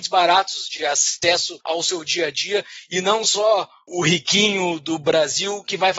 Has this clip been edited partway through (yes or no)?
no